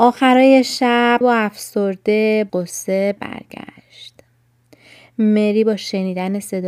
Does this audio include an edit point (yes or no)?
yes